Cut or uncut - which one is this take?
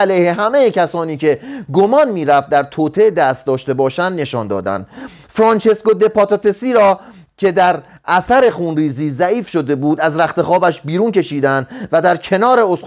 uncut